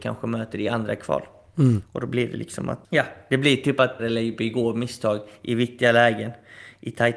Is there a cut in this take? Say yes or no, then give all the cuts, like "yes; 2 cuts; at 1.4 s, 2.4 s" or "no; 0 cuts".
yes; 1 cut; at 4.0 s